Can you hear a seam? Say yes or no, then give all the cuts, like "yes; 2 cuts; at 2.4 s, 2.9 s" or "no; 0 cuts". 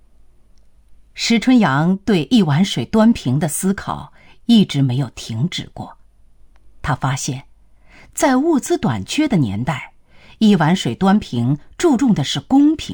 no; 0 cuts